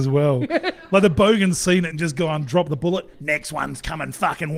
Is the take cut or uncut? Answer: uncut